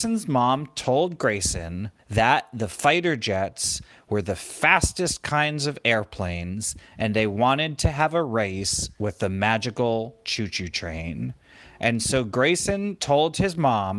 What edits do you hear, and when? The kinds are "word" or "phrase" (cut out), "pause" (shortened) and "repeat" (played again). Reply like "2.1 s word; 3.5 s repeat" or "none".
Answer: 2.0 s pause